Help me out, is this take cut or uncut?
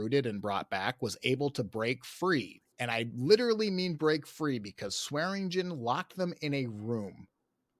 cut